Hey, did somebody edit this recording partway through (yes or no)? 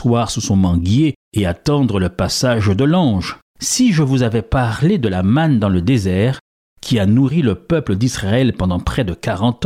no